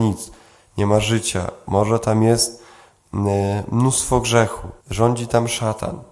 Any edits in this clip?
yes; 1 cut; at 4.8 s

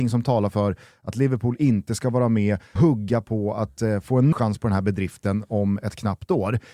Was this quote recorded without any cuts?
no; 2 cuts; at 2.8 s, 4.3 s

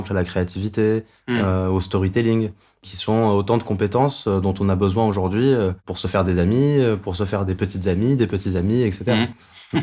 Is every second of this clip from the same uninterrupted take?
yes; 0 cuts

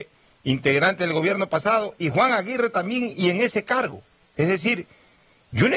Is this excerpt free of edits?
yes; 0 cuts

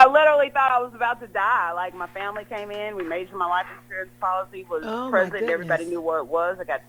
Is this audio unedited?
yes; 0 cuts

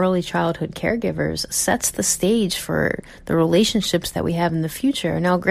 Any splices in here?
no; 0 cuts

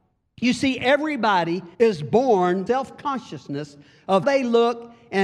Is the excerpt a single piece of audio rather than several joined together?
no; 3 cuts; at 1.7 s, 2.7 s, 4.2 s

